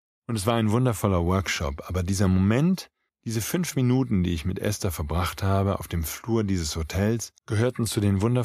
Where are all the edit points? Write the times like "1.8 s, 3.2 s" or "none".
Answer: 3.1 s, 7.4 s